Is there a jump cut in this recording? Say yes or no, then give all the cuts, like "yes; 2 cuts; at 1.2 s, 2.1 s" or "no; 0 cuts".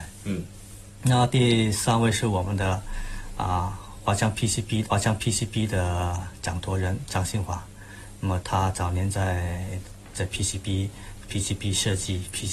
yes; 1 cut; at 4.9 s